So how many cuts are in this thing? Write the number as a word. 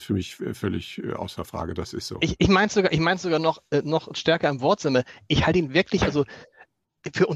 zero